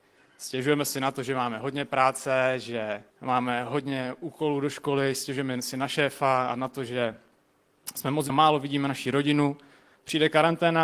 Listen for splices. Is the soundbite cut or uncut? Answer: cut